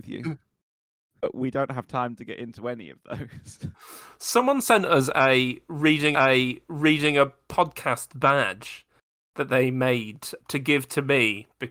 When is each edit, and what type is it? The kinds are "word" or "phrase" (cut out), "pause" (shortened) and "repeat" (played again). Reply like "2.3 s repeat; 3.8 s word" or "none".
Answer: 3.7 s pause; 6.1 s repeat; 10.4 s word